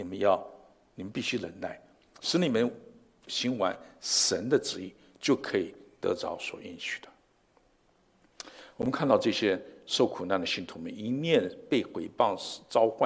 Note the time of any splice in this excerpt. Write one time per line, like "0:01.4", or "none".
none